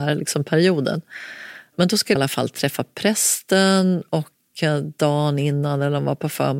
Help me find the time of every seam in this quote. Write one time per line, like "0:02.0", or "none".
0:02.2